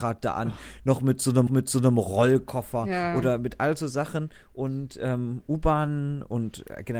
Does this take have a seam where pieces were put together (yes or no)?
yes